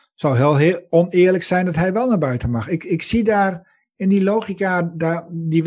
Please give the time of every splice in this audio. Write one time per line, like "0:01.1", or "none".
none